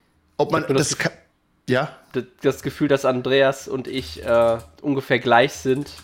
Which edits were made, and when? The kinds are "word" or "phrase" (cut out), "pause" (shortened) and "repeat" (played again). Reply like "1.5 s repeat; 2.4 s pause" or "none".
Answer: none